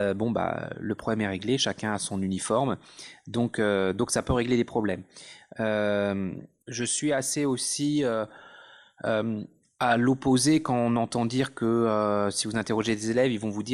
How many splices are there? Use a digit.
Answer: 0